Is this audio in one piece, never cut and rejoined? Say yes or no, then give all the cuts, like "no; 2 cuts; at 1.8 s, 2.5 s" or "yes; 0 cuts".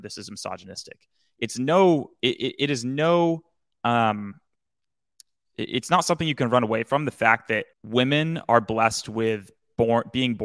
no; 1 cut; at 7.7 s